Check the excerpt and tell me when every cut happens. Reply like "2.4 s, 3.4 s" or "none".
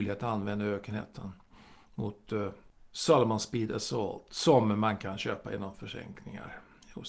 none

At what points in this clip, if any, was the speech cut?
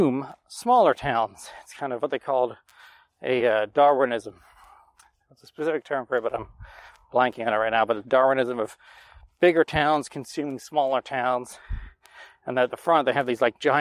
none

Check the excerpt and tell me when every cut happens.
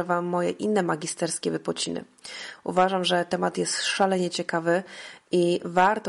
none

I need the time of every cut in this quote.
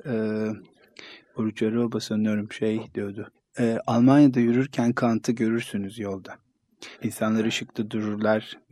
3.3 s, 6.9 s

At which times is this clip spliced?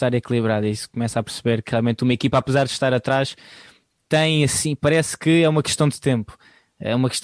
none

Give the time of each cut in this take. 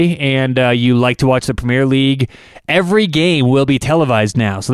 none

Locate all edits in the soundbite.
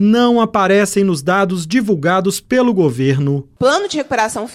none

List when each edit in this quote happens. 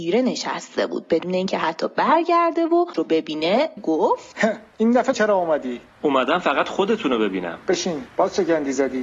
2.9 s, 3.8 s, 5.1 s

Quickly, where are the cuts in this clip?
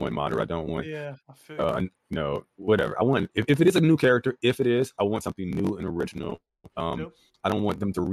1.2 s, 6.7 s

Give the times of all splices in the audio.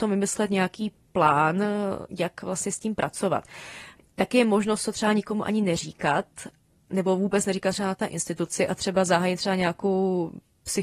none

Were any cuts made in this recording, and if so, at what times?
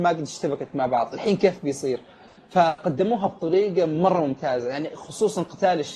none

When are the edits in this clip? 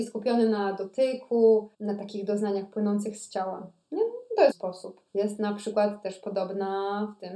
1.7 s, 4.5 s, 5.1 s

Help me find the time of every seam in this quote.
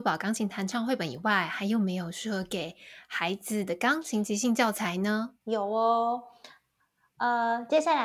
5.4 s

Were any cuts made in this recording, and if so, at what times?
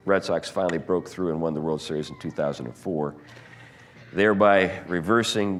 none

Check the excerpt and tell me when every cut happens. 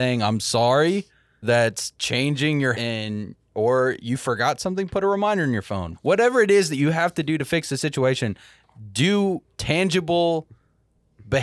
1.4 s, 2.7 s, 5.9 s

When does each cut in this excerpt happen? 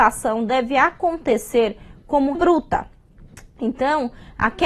2.3 s

